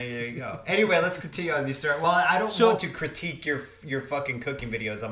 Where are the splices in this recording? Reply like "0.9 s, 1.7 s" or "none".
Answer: none